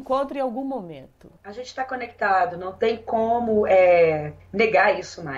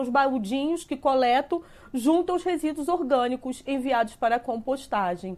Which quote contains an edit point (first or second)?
first